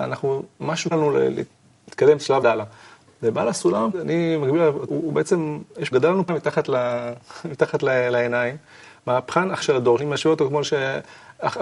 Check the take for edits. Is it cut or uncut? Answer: cut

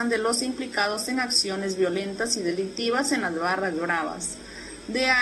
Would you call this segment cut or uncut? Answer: uncut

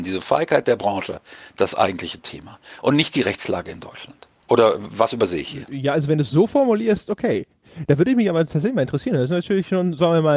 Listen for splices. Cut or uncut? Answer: uncut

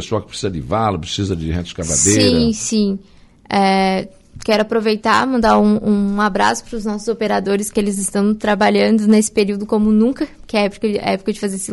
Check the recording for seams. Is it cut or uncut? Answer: uncut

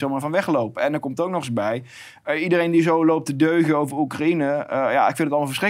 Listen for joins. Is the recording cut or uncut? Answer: uncut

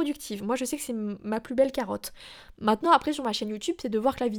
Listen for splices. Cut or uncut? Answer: uncut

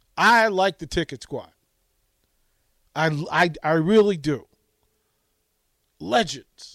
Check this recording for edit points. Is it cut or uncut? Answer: uncut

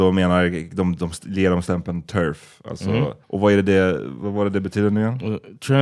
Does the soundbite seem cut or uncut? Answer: cut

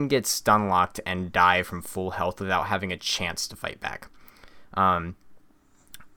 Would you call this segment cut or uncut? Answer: uncut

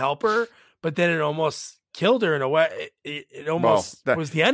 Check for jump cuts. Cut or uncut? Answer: uncut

